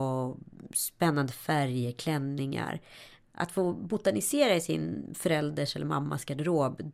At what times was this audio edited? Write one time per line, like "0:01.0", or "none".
none